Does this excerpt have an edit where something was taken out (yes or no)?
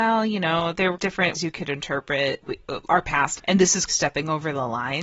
yes